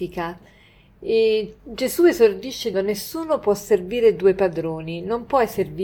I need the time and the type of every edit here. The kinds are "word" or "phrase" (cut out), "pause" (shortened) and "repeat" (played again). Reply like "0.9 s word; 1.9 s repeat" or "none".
2.7 s word